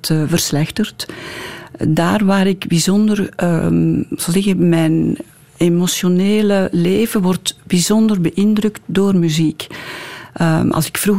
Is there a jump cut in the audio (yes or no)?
no